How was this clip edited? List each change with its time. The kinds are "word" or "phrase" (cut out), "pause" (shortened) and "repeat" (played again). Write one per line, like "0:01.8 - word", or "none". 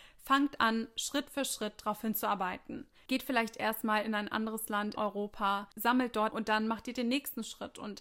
0:05.0 - word
0:06.3 - word